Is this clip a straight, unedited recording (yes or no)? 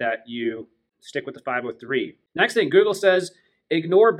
yes